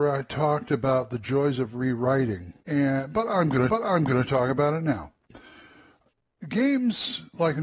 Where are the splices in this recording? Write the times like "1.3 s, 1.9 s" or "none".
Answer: 2.6 s, 3.7 s